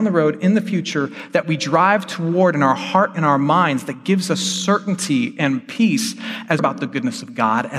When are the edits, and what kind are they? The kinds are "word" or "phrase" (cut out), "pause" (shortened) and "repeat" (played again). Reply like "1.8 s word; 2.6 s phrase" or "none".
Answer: 6.6 s phrase